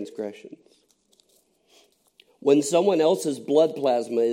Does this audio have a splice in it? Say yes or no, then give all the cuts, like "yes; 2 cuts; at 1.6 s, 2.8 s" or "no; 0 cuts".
no; 0 cuts